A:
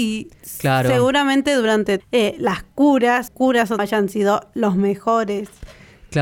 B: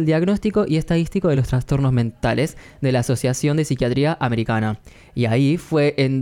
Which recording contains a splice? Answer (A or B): A